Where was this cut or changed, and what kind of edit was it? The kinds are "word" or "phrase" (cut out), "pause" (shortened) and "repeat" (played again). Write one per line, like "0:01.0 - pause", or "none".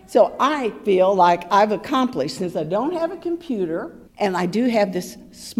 0:04.1 - pause